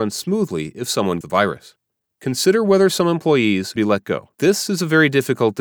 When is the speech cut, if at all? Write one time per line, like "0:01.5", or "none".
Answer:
0:01.2
0:02.1
0:03.8
0:04.3